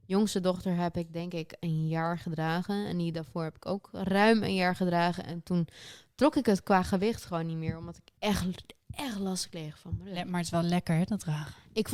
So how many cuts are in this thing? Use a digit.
1